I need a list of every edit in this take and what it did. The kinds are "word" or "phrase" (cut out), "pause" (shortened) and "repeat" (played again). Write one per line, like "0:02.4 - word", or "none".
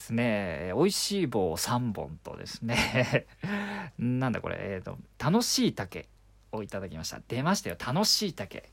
none